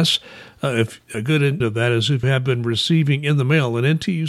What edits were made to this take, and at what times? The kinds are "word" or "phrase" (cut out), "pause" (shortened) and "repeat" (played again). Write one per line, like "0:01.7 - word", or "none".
0:01.1 - word
0:01.6 - word
0:02.2 - word